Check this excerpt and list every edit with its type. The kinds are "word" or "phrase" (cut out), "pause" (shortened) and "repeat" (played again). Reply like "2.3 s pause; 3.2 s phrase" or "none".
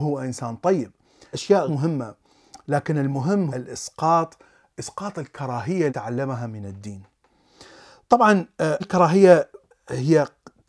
1.3 s word; 1.7 s word; 3.5 s word; 5.9 s word; 8.8 s word